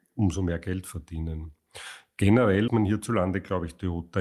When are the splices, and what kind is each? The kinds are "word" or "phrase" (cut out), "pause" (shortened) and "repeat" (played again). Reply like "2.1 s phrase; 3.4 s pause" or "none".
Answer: 2.7 s word